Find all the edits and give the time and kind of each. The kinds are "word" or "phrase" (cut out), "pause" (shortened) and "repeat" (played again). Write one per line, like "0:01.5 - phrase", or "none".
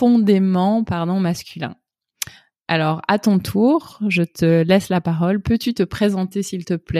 none